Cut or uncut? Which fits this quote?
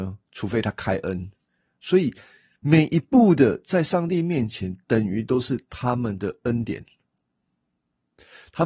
uncut